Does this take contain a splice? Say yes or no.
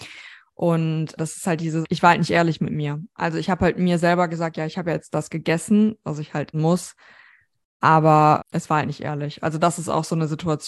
yes